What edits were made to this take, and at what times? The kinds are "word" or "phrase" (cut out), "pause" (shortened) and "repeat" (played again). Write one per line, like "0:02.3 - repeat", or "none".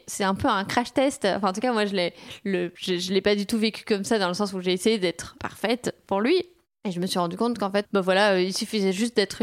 0:02.7 - pause
0:05.4 - word
0:07.8 - word